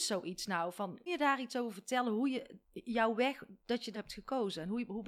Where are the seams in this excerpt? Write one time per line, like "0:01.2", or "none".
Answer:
0:01.1
0:02.6
0:03.6
0:03.9